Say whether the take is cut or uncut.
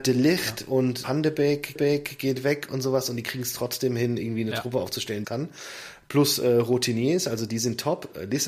cut